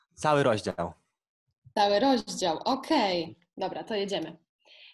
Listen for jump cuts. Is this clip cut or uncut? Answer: uncut